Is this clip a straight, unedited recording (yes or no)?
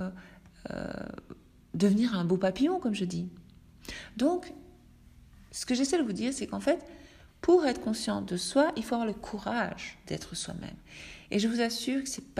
yes